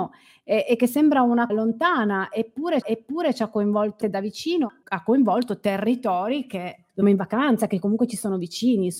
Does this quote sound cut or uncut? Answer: cut